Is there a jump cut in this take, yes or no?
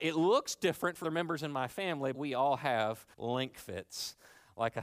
yes